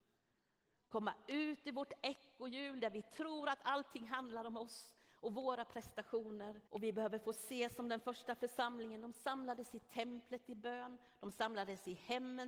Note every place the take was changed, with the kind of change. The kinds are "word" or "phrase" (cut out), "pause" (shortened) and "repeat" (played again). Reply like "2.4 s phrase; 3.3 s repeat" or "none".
6.7 s pause